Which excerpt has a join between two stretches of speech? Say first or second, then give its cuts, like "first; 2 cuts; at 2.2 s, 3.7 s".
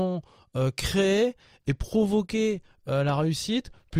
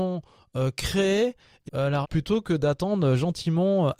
second; 2 cuts; at 1.7 s, 2.0 s